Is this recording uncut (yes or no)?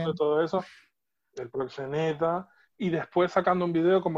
yes